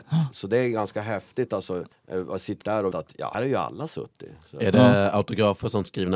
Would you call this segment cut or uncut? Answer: cut